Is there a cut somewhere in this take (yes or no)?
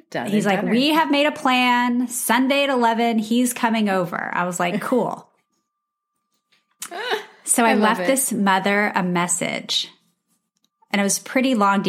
no